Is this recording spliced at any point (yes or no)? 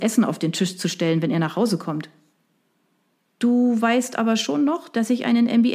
no